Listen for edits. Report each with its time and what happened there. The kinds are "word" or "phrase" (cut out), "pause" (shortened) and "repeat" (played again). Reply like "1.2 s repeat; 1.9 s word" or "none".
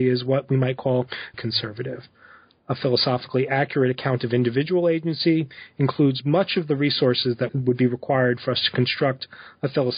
1.3 s word; 7.5 s word